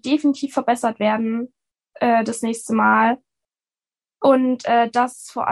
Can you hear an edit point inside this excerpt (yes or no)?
no